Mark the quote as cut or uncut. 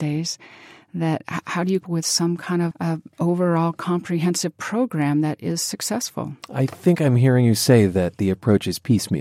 cut